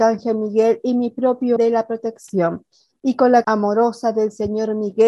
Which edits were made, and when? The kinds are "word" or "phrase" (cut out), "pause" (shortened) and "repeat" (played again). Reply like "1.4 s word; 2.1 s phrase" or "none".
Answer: 1.6 s word; 3.4 s word